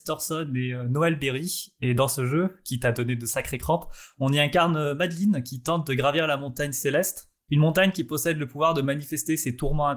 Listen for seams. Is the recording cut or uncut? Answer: uncut